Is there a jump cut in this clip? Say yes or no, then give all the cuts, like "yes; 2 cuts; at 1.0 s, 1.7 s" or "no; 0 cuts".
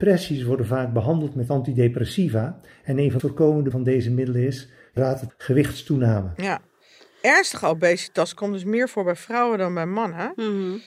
yes; 4 cuts; at 3.2 s, 3.7 s, 5.0 s, 5.3 s